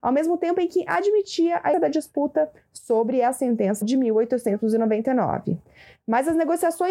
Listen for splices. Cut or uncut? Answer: cut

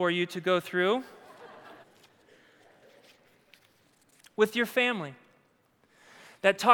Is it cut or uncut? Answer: cut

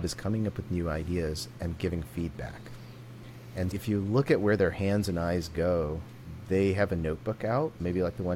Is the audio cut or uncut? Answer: cut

